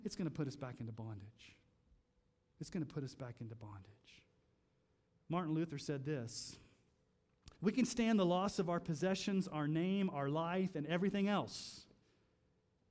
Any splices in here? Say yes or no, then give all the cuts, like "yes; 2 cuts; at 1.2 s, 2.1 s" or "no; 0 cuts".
yes; 1 cut; at 7.5 s